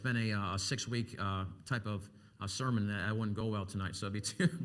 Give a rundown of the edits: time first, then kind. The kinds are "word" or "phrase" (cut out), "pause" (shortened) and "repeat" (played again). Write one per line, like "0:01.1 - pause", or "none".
none